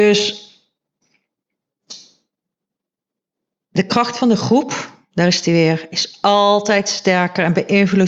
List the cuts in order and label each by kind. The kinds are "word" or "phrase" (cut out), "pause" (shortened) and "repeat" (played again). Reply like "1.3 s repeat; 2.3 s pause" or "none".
none